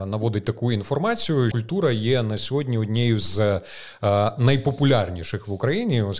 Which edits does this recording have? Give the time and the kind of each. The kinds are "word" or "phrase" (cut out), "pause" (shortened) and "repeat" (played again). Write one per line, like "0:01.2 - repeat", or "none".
0:01.5 - word

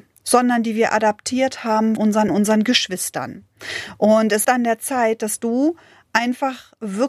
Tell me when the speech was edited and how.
0:02.0 - word
0:02.3 - phrase
0:04.4 - word

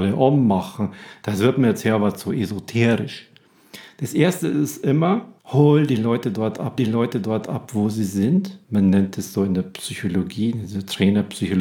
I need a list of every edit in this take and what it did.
0:05.4 - pause
0:06.8 - repeat
0:08.6 - pause

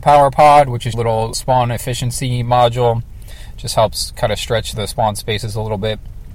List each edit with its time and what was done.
0:00.9 - word
0:01.3 - word
0:04.7 - word

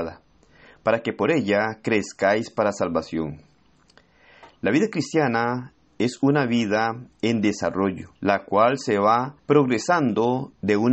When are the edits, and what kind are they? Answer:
0:08.2 - pause
0:09.4 - pause

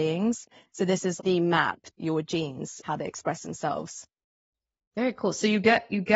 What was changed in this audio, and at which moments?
0:01.2 - word
0:01.9 - word
0:02.8 - word

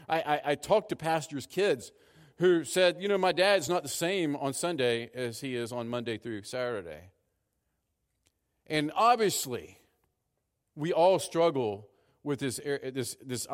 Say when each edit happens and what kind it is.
none

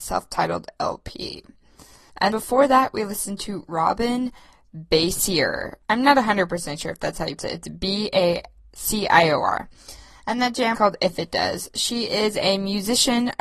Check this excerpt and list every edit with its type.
0:02.3 - word
0:07.4 - word
0:10.7 - word

